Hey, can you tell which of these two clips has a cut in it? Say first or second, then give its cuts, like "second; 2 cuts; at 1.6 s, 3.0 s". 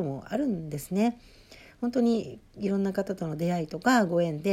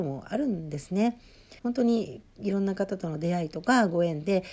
second; 1 cut; at 1.6 s